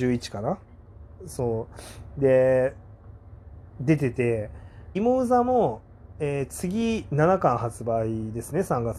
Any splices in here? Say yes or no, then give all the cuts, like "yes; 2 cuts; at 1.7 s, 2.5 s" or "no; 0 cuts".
yes; 2 cuts; at 3.7 s, 4.9 s